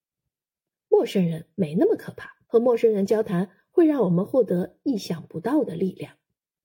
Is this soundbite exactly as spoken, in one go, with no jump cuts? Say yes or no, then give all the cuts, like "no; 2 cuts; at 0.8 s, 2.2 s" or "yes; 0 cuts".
no; 1 cut; at 2.4 s